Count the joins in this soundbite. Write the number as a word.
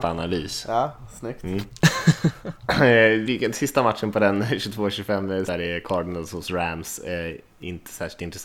two